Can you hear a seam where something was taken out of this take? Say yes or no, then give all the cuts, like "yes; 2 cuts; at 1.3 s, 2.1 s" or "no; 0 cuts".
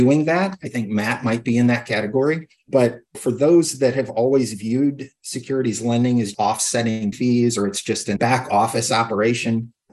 yes; 2 cuts; at 6.3 s, 7.1 s